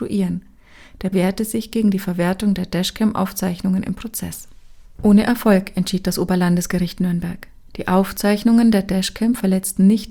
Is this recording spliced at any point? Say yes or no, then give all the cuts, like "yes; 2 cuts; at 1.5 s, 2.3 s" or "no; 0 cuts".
yes; 1 cut; at 1.1 s